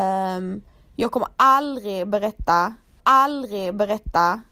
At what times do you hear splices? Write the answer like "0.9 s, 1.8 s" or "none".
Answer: 3.0 s